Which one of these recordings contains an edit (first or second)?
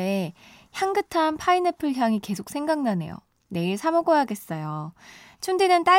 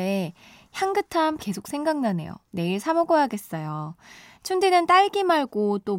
second